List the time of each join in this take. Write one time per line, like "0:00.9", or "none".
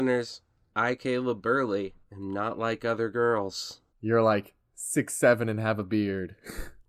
0:02.0
0:03.9